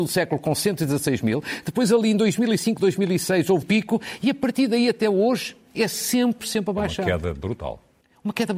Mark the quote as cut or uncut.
cut